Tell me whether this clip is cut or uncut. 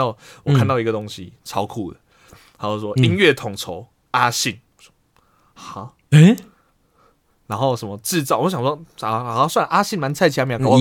uncut